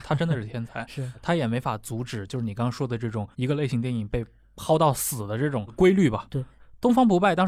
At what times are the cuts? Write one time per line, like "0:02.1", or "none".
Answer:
0:03.3